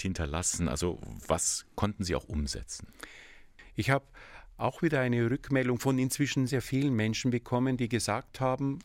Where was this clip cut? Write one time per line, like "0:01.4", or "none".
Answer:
0:06.5